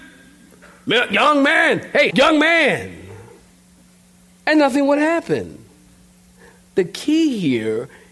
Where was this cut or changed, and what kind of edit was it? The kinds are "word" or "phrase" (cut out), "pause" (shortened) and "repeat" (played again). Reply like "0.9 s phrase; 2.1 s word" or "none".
2.1 s word